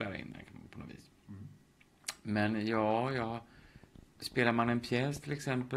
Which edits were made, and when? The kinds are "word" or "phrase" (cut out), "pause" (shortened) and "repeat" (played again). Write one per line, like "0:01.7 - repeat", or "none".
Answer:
0:04.1 - pause